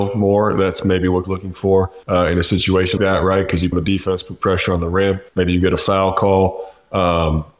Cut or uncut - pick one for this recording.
cut